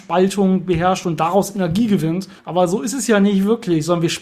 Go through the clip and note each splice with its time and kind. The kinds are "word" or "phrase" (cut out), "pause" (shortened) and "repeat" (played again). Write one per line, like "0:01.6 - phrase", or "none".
0:02.4 - pause